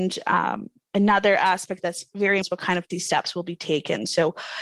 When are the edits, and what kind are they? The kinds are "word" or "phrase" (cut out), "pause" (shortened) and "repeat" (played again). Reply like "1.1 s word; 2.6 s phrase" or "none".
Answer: 2.4 s word; 2.9 s word